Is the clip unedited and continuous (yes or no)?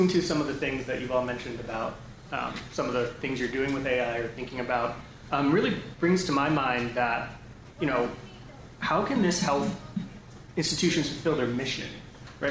yes